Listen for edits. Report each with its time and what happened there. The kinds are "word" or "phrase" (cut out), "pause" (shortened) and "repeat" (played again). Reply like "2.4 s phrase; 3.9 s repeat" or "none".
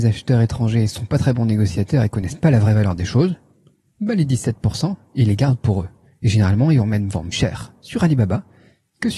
7.3 s word